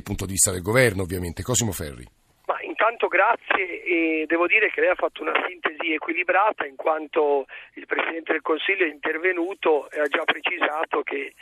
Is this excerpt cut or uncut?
cut